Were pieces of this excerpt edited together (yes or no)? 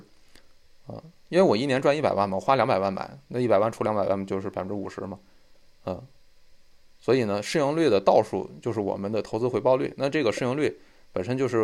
no